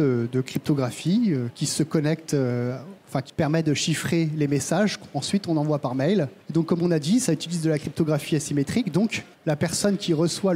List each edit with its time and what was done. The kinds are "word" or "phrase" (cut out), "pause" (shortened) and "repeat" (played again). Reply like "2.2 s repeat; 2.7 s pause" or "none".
3.0 s pause; 6.4 s pause; 9.3 s pause

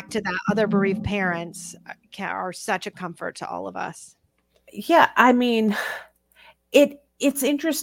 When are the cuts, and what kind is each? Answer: none

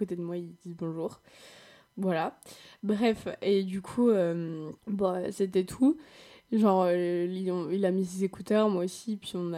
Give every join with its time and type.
4.8 s pause

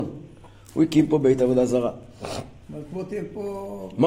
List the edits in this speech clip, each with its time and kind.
none

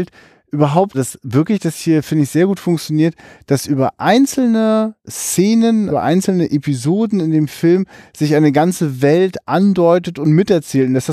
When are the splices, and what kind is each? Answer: 0.9 s word; 5.9 s word

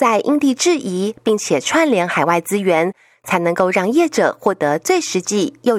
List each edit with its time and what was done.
none

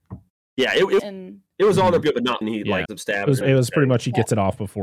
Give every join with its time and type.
1.0 s word; 2.0 s word; 2.4 s word; 2.9 s word; 3.4 s word

